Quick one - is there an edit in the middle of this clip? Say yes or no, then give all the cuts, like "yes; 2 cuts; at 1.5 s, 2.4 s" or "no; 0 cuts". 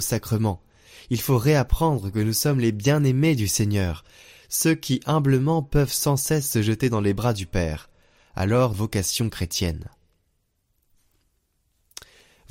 yes; 1 cut; at 8.7 s